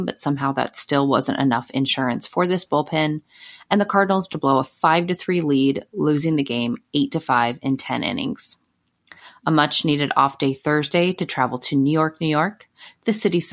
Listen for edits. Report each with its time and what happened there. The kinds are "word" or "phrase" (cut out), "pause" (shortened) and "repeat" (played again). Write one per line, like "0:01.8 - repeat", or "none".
0:04.3 - word